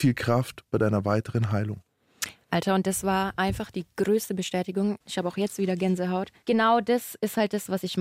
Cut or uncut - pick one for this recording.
uncut